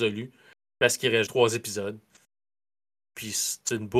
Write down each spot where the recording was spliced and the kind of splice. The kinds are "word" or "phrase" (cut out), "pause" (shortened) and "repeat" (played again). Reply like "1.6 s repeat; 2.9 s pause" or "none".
1.3 s word